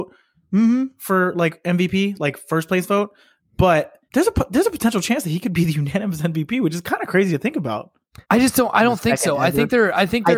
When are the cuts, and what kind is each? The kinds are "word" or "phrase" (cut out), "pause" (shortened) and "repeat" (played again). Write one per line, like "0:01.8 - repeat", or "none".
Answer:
0:04.1 - pause
0:08.2 - pause